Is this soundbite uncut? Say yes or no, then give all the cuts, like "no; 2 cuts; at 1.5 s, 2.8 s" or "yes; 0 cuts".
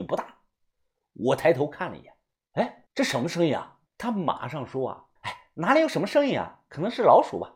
no; 3 cuts; at 2.9 s, 3.9 s, 5.2 s